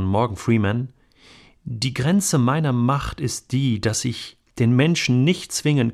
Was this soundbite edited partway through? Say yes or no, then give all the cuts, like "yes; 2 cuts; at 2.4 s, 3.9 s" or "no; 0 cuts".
no; 0 cuts